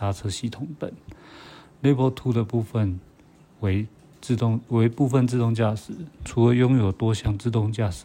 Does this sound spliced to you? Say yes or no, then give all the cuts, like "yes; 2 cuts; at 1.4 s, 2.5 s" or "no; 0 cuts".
no; 0 cuts